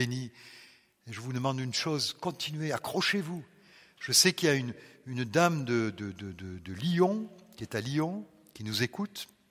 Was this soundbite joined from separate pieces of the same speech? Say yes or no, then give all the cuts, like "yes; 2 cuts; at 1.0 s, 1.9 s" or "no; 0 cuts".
no; 0 cuts